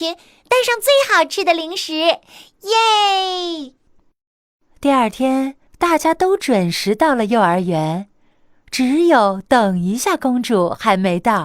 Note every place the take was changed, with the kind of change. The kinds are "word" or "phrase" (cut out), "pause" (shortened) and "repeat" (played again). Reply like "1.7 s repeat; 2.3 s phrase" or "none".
5.7 s pause

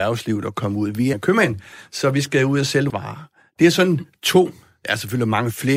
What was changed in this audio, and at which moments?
1.1 s phrase; 2.9 s word

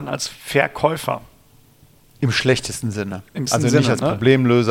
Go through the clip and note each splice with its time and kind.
3.5 s word

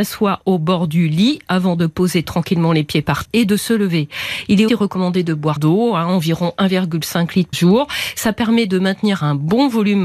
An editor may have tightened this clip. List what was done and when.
3.2 s word; 4.7 s word; 5.6 s word; 7.5 s word

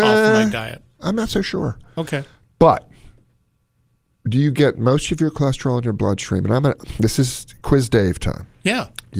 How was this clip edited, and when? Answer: none

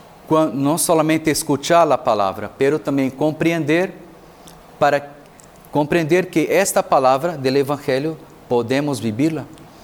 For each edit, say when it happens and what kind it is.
none

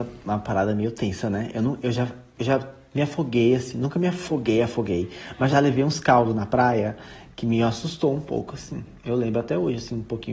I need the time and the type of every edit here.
5.5 s word

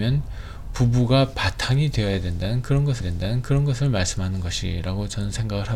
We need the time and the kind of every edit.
3.0 s repeat

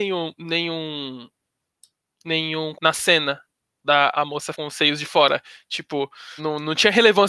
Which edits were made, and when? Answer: 2.7 s word; 4.1 s word; 4.5 s word; 6.4 s word

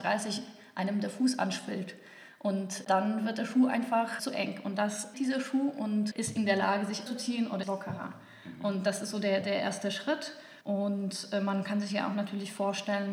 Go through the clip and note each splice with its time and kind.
4.2 s word; 5.1 s word; 6.1 s word; 7.1 s phrase; 7.6 s word; 9.4 s word; 10.6 s pause

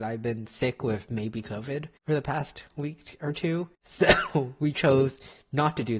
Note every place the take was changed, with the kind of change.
2.0 s pause; 3.7 s pause

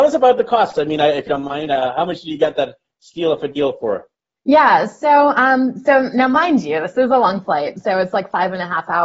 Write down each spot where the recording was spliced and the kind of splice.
none

